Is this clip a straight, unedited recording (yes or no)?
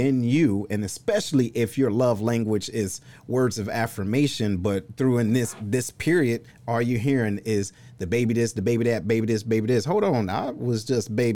yes